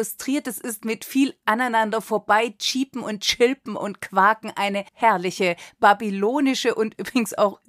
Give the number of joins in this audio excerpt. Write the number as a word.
one